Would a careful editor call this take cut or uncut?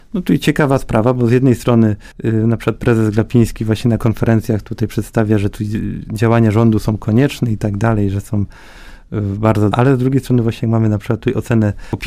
cut